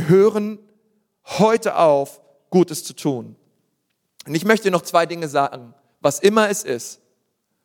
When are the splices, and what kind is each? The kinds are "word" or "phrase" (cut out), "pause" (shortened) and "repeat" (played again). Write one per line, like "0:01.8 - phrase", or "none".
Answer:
none